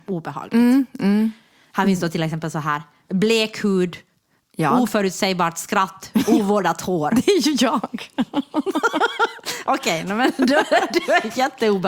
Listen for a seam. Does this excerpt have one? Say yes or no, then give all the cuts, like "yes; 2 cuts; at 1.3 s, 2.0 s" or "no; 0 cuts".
no; 0 cuts